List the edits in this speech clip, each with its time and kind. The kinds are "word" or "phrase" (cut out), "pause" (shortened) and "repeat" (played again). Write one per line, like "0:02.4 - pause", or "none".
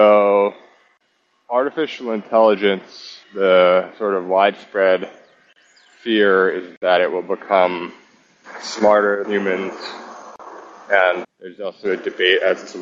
0:03.2 - pause
0:09.2 - word
0:11.2 - word

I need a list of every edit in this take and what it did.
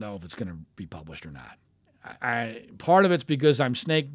0:02.2 - word

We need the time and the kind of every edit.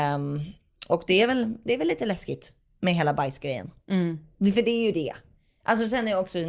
none

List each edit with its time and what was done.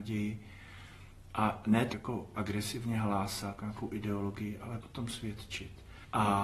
0:01.9 - word
0:03.6 - word
0:04.8 - word

